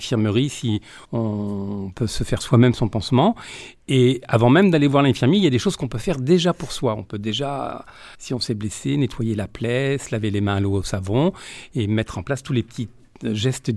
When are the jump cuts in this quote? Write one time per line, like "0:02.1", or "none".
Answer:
0:01.0
0:08.1